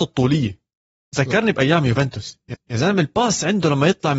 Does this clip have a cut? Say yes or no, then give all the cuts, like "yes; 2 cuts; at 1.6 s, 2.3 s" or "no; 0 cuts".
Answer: yes; 1 cut; at 2.5 s